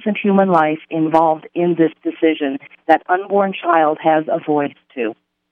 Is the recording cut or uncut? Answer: uncut